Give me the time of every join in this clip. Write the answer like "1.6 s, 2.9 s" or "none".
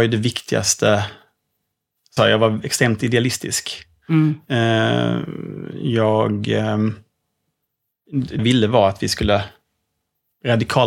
2.2 s, 8.4 s